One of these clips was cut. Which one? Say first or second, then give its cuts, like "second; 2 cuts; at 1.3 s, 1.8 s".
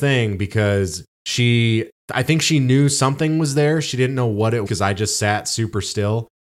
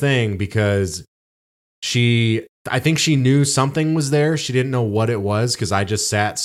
first; 2 cuts; at 1.1 s, 4.7 s